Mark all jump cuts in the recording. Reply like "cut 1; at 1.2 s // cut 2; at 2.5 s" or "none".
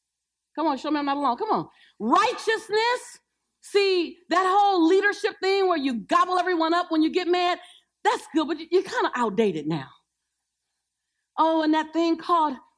none